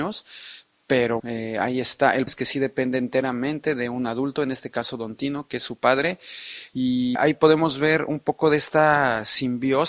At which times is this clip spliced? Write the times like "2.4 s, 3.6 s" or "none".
1.2 s, 2.3 s, 7.2 s